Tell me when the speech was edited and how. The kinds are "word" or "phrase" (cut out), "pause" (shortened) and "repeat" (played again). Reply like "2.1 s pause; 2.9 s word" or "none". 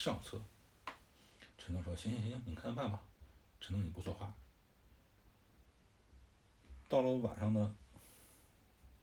1.5 s pause; 3.1 s pause